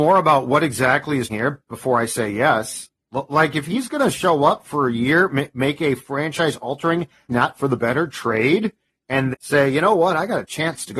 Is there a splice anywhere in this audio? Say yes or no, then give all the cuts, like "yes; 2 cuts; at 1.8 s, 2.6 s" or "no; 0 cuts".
yes; 3 cuts; at 1.3 s, 7.3 s, 9.3 s